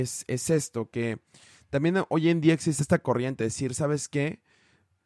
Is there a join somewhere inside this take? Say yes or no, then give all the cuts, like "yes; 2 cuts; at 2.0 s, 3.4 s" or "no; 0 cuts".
yes; 1 cut; at 3.4 s